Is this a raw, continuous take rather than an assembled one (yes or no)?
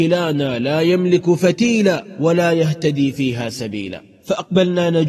yes